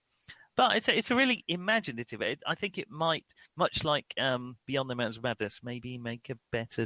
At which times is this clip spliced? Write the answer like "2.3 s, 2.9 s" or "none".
none